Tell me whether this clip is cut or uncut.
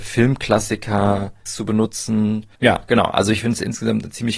cut